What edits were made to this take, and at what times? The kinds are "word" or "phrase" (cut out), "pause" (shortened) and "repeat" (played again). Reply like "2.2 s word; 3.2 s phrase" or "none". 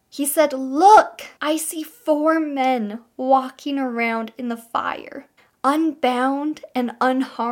1.4 s pause; 5.4 s pause